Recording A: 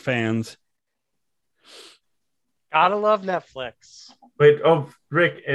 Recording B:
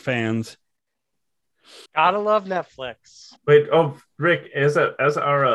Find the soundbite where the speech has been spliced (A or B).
B